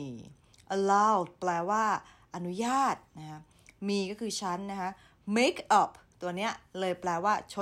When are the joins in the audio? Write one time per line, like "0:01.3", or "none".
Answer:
none